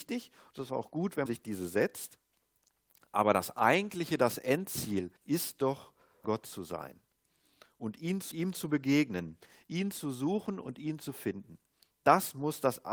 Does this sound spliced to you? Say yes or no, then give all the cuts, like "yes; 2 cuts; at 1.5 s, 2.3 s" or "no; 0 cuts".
yes; 4 cuts; at 1.3 s, 5.2 s, 6.2 s, 8.3 s